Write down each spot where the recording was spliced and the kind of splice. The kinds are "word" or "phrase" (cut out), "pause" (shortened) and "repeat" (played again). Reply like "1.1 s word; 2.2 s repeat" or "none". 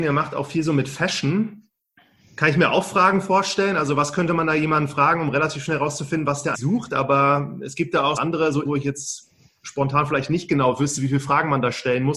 6.5 s word; 8.2 s word; 8.7 s word